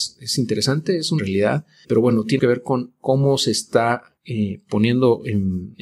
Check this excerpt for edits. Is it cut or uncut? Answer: cut